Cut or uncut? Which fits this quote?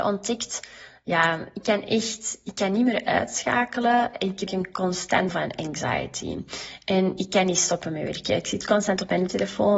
cut